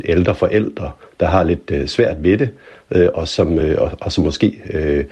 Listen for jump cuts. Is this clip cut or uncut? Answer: uncut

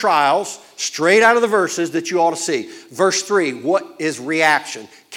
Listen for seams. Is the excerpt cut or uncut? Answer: uncut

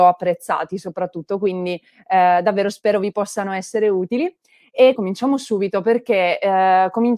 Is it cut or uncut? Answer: cut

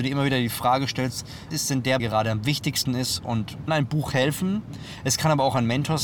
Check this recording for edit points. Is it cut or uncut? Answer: cut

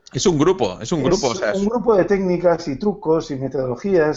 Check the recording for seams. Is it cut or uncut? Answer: uncut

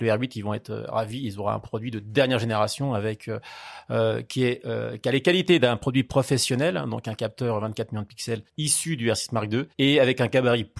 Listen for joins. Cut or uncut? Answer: cut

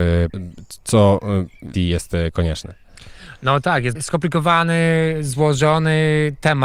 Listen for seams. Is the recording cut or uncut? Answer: cut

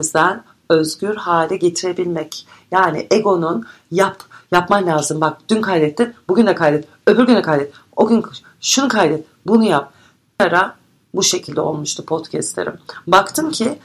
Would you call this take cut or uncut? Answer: uncut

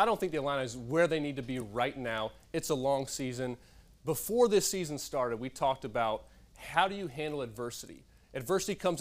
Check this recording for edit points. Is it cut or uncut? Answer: uncut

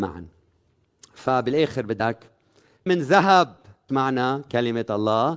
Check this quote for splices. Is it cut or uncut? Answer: cut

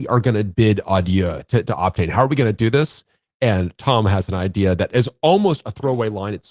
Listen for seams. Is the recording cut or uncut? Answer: uncut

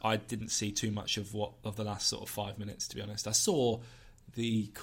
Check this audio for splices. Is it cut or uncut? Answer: uncut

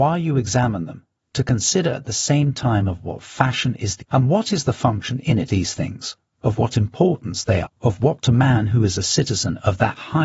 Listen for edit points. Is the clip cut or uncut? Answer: cut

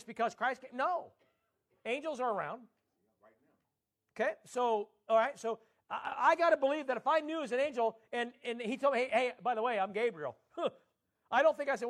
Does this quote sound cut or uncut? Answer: uncut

